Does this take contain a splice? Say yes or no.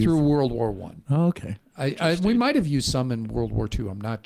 no